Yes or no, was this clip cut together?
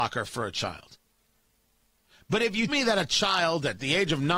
yes